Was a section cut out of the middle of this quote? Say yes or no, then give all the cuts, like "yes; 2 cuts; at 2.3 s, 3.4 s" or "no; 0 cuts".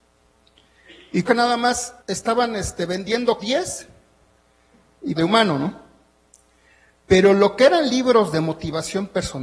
yes; 4 cuts; at 1.3 s, 2.0 s, 3.4 s, 5.2 s